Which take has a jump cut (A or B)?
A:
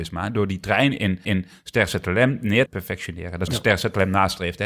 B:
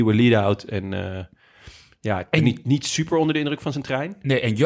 A